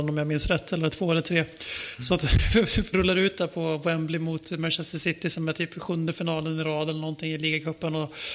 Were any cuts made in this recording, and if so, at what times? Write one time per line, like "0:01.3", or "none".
0:02.9

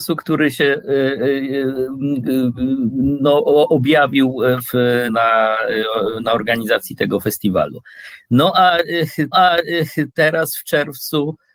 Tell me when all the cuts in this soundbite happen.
0:05.1
0:09.3

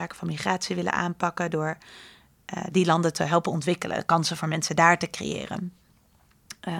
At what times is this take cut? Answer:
none

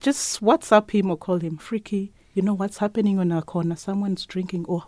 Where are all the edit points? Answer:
0:01.6

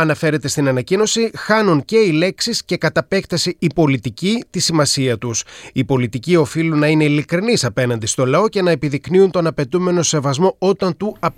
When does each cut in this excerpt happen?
none

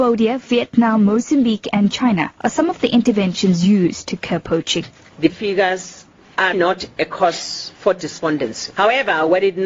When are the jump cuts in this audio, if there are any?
0:02.3
0:05.3
0:06.5

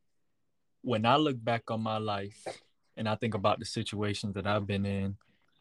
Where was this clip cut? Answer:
none

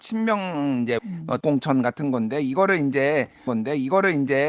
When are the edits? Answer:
0:01.0
0:01.4
0:03.5

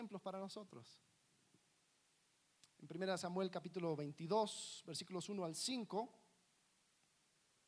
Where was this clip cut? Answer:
none

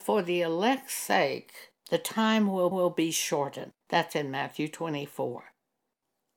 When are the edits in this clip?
0:01.8
0:02.7
0:03.8

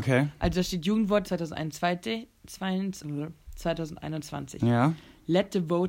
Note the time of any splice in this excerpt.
0:01.2
0:03.0

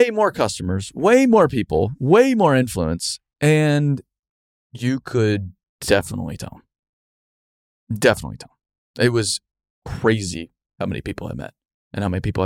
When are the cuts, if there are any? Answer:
none

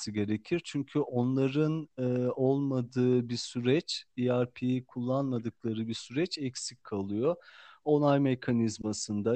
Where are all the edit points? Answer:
none

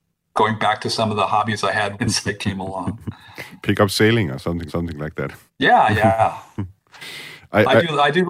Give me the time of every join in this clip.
0:02.0
0:04.7
0:05.5

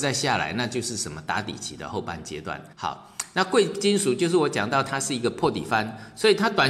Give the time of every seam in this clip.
0:02.7

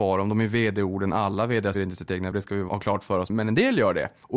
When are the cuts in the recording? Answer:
0:01.7
0:02.3
0:02.7
0:03.3

